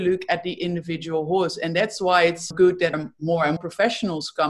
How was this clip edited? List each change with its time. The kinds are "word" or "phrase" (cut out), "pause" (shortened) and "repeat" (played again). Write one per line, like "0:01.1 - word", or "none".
0:02.5 - word
0:02.9 - word
0:03.6 - word